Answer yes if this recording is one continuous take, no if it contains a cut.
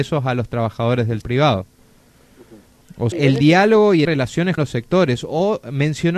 no